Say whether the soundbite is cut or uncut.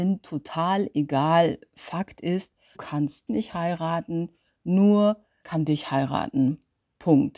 cut